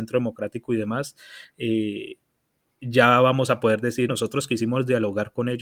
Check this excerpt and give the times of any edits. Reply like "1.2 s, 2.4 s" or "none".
4.1 s

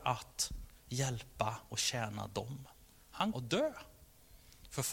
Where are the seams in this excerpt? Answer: 3.3 s

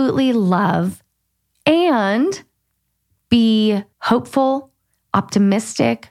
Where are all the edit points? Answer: 3.9 s

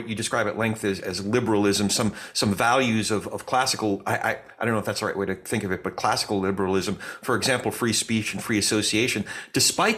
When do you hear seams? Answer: none

